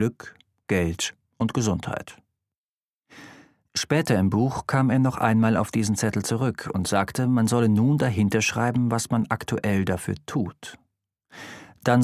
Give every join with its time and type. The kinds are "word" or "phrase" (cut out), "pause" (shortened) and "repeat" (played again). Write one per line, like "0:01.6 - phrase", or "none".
none